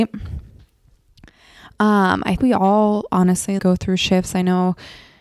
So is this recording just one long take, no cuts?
no; 2 cuts; at 2.4 s, 3.6 s

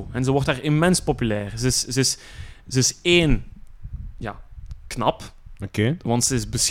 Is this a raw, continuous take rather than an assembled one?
yes; 0 cuts

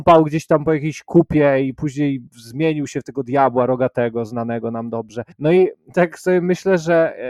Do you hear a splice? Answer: yes; 2 cuts; at 2.3 s, 5.3 s

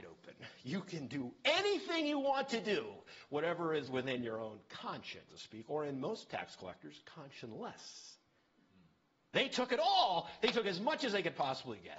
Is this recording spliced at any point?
yes; 1 cut; at 5.3 s

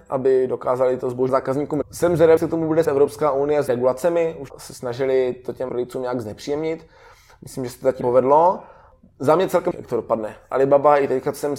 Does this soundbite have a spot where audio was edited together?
yes; 9 cuts; at 1.3 s, 1.8 s, 2.4 s, 2.8 s, 3.7 s, 4.5 s, 5.7 s, 8.0 s, 9.7 s

